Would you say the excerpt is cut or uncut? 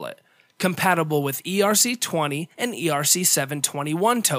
cut